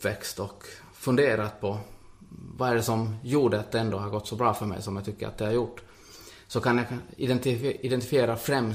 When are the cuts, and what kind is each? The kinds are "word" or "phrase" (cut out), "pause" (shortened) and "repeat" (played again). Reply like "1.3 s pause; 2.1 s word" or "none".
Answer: none